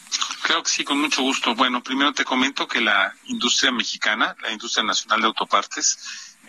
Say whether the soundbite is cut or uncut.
uncut